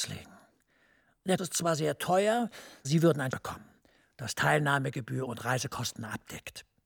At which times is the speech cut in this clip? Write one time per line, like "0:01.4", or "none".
0:01.4
0:02.8
0:03.3
0:05.3

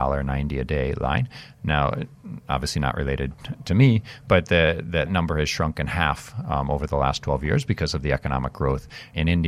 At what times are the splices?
0:05.1

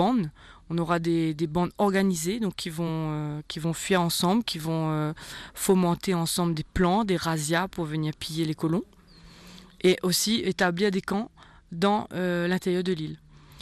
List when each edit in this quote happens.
none

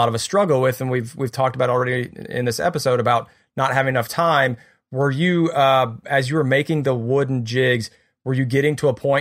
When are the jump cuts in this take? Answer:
none

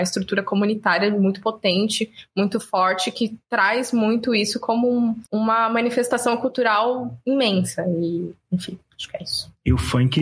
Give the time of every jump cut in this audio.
0:05.3

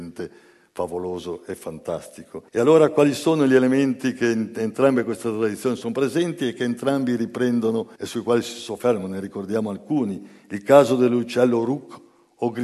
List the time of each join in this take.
0:02.5
0:08.0

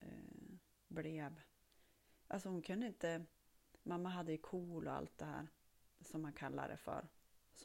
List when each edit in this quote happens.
none

